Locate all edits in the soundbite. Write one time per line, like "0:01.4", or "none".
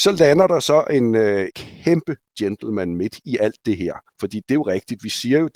0:01.5
0:04.1